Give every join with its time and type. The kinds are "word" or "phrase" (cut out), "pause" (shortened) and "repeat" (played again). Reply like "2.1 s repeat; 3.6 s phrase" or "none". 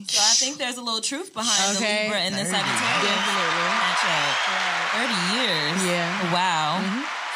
none